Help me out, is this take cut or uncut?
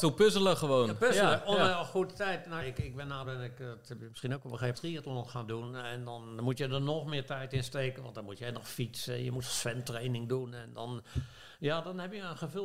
cut